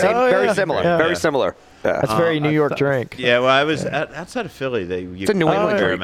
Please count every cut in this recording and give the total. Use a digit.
0